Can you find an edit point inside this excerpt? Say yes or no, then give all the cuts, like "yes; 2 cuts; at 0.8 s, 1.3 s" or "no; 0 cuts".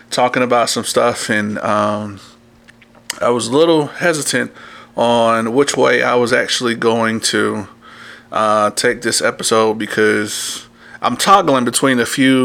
no; 0 cuts